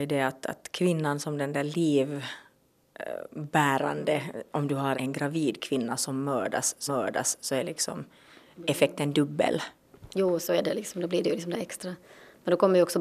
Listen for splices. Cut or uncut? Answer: cut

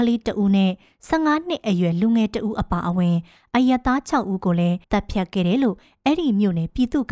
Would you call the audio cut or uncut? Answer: cut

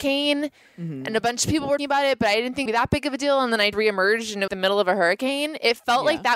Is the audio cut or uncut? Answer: cut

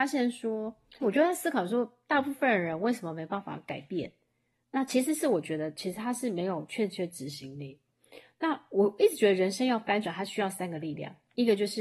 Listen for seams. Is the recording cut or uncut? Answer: cut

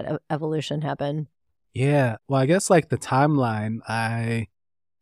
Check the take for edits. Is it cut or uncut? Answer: uncut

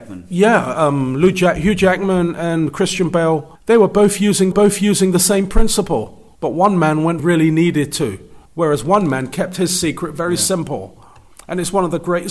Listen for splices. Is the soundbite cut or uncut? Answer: cut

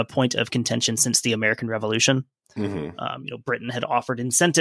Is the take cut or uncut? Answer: uncut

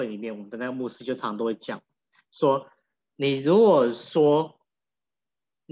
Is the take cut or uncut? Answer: uncut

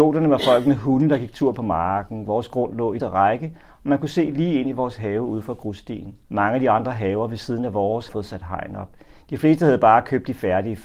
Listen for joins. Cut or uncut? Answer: cut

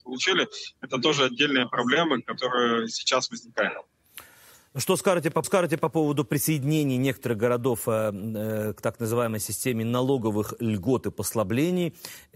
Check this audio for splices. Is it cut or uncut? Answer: cut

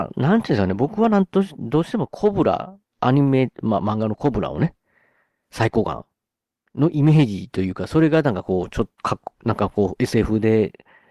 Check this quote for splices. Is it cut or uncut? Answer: cut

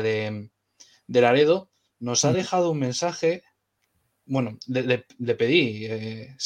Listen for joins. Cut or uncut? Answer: uncut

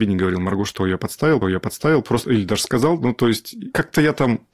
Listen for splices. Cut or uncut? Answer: cut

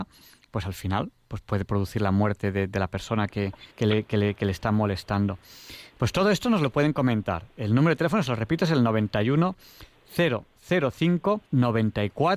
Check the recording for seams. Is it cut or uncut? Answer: cut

